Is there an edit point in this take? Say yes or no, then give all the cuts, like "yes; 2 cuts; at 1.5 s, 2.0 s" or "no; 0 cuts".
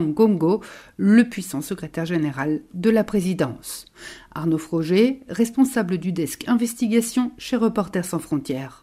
no; 0 cuts